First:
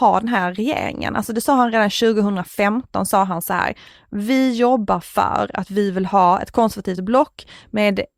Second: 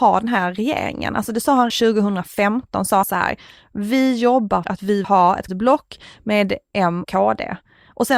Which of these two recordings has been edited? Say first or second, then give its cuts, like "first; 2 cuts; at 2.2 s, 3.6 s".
second; 6 cuts; at 1.7 s, 3.0 s, 4.6 s, 5.0 s, 5.5 s, 7.0 s